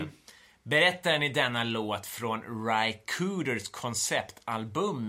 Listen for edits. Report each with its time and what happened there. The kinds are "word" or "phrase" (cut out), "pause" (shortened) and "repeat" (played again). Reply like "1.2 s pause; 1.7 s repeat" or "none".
none